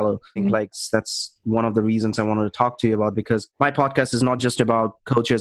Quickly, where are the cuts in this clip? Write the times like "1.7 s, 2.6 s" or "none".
none